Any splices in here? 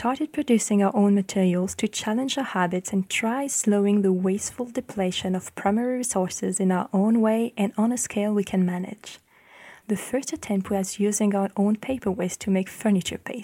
no; 0 cuts

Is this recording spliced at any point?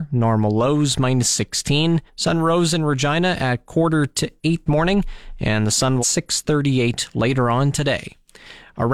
yes; 3 cuts; at 2.1 s, 4.7 s, 6.0 s

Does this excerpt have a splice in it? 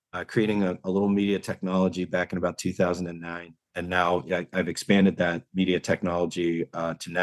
yes; 1 cut; at 3.6 s

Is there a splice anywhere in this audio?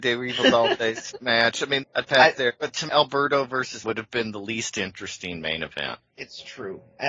yes; 3 cuts; at 1.8 s, 2.9 s, 3.8 s

